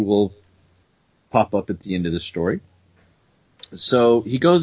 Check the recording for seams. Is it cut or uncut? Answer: uncut